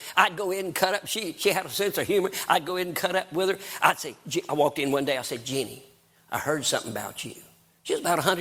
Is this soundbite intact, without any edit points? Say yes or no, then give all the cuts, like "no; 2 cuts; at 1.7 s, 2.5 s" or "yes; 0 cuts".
yes; 0 cuts